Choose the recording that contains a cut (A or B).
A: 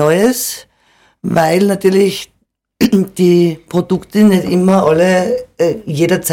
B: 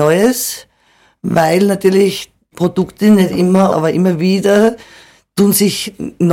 B